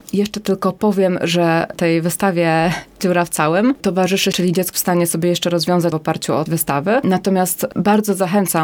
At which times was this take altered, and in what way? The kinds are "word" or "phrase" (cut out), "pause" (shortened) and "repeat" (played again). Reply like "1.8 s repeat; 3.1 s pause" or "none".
4.3 s phrase; 4.7 s word; 5.9 s phrase; 6.5 s word